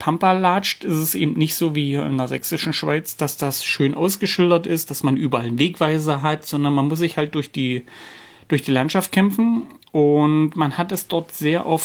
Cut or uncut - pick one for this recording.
uncut